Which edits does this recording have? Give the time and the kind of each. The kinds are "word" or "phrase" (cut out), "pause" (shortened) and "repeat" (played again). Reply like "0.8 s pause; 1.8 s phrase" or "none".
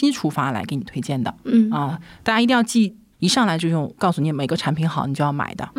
none